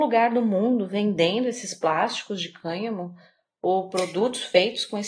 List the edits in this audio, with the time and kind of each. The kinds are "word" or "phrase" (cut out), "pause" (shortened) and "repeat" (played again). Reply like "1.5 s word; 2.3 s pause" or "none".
none